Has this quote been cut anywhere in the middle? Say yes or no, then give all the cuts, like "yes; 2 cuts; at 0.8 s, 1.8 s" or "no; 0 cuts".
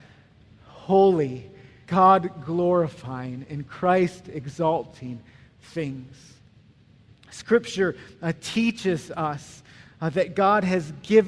yes; 1 cut; at 1.9 s